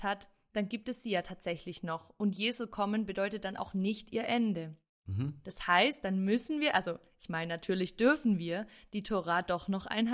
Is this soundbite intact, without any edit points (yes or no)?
yes